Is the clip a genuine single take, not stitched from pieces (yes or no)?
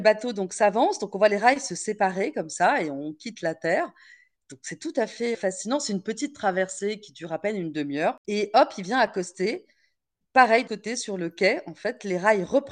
no